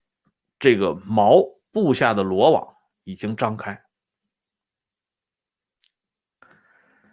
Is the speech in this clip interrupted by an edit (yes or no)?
no